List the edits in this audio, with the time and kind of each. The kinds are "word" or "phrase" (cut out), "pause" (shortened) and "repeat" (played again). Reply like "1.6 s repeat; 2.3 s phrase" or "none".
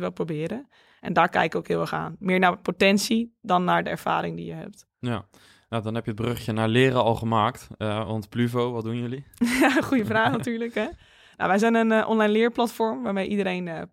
none